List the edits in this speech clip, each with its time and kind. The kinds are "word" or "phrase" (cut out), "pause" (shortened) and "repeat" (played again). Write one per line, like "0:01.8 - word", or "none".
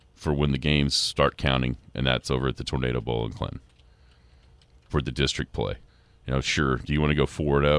0:05.9 - pause